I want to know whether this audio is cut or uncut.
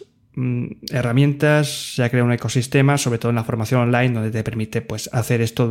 uncut